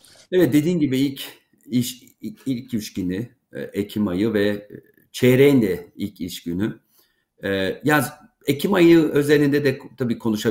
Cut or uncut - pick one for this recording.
uncut